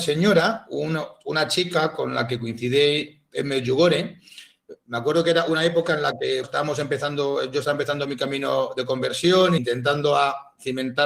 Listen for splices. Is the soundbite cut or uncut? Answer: cut